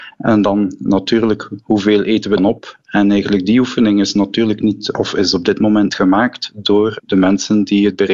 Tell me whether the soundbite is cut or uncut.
cut